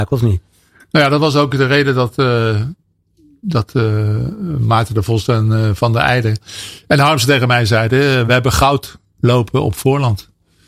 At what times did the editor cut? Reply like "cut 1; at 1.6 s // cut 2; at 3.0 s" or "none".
none